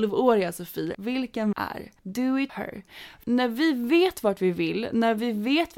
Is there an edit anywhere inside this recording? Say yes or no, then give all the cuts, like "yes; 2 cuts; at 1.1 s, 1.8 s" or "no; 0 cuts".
yes; 5 cuts; at 0.9 s, 1.5 s, 2.0 s, 2.5 s, 3.2 s